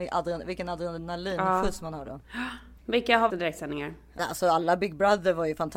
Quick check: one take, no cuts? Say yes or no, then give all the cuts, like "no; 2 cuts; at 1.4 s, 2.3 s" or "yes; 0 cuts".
no; 3 cuts; at 2.8 s, 3.3 s, 4.2 s